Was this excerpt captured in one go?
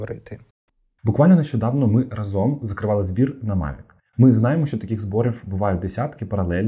yes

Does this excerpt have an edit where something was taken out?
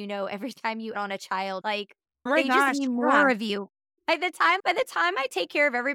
yes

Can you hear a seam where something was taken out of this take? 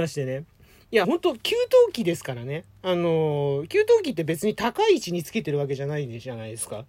yes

